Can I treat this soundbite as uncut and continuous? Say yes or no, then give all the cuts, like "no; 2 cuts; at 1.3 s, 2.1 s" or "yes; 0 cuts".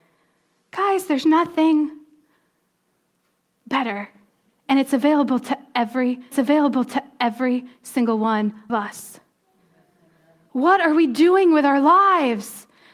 no; 2 cuts; at 6.3 s, 8.7 s